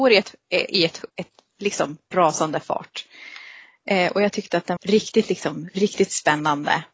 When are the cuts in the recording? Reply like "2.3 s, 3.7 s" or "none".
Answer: 1.1 s, 2.1 s, 4.8 s

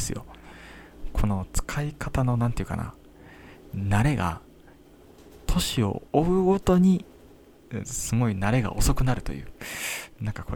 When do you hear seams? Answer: 6.1 s

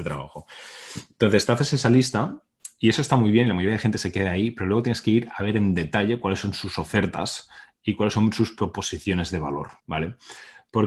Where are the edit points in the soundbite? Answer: 9.8 s

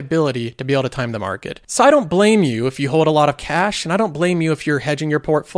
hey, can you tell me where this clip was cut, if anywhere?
none

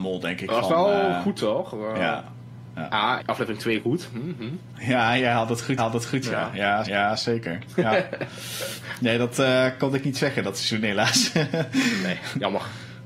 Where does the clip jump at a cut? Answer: 3.2 s, 5.8 s, 6.8 s

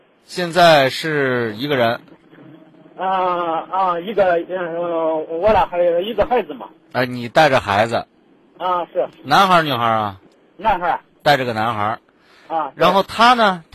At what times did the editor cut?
none

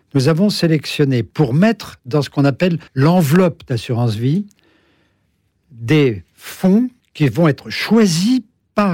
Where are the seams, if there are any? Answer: 2.9 s, 7.0 s

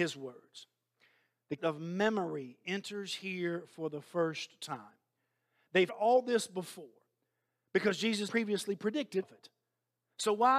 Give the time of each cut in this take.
1.6 s, 5.9 s, 8.3 s, 9.2 s

